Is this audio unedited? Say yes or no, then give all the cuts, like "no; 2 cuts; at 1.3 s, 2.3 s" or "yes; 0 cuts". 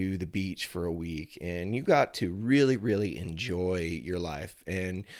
yes; 0 cuts